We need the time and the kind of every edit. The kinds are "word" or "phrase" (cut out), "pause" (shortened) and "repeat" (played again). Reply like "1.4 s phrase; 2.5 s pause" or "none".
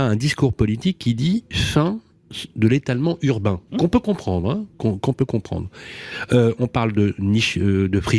3.7 s pause; 4.7 s pause